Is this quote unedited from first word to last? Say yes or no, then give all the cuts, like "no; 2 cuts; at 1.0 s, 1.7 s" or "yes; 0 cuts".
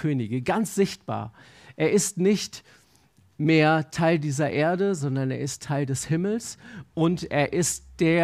yes; 0 cuts